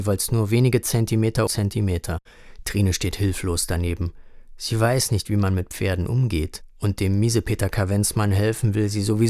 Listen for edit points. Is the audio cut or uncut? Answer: cut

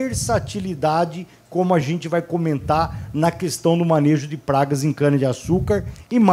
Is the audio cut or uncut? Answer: uncut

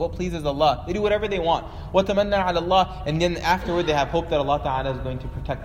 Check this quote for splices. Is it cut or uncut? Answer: uncut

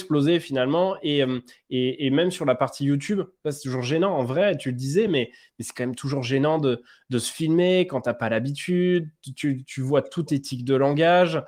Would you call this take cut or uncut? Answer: uncut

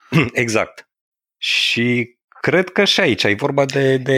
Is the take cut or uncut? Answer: cut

